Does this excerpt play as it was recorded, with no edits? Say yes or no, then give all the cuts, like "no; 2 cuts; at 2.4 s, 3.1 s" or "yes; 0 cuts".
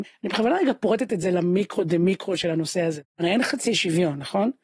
yes; 0 cuts